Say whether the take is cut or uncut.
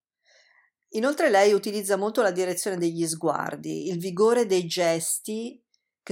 uncut